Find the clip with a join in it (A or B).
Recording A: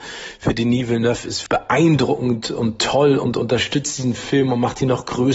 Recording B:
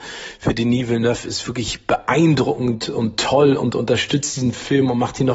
A